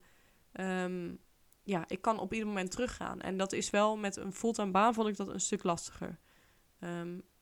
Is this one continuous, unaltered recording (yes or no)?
yes